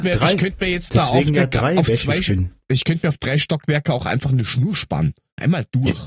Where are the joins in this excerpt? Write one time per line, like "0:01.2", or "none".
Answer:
none